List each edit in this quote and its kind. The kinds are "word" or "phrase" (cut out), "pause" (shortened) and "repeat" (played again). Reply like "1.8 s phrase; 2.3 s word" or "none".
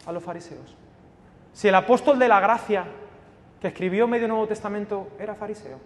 none